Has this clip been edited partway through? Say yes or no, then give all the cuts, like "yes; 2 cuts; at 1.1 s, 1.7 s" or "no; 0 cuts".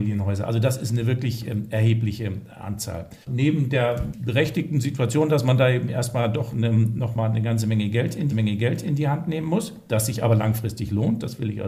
yes; 2 cuts; at 3.2 s, 8.3 s